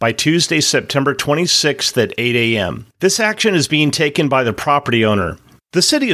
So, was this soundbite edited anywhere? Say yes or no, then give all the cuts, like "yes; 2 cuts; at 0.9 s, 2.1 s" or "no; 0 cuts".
yes; 1 cut; at 2.9 s